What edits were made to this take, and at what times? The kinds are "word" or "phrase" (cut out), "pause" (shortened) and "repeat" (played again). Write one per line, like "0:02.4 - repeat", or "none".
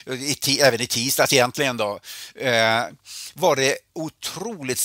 none